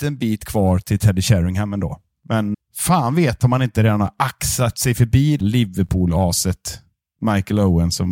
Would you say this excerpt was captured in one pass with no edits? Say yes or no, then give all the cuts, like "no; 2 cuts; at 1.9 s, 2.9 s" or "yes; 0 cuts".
no; 2 cuts; at 2.5 s, 5.4 s